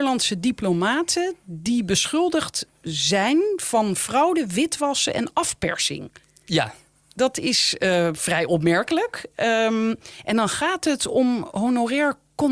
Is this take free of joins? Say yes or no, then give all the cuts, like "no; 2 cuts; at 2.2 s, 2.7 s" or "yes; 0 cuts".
yes; 0 cuts